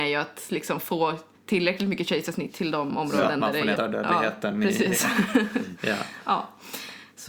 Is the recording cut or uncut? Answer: cut